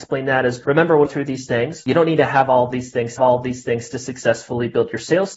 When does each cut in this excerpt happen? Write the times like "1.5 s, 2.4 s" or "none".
1.1 s, 3.2 s